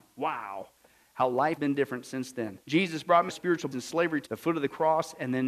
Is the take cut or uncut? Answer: cut